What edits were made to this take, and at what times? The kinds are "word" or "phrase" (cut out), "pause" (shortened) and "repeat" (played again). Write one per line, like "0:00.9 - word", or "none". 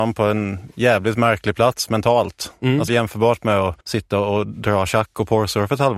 0:02.9 - phrase
0:03.8 - pause